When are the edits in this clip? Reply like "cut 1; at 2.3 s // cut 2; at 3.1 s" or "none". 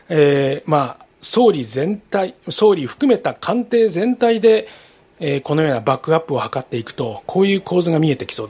none

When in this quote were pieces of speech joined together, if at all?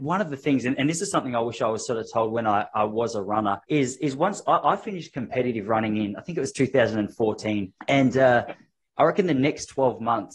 cut 1; at 3.6 s // cut 2; at 7.8 s

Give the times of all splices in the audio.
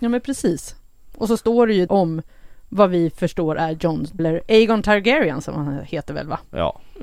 cut 1; at 1.9 s // cut 2; at 4.2 s

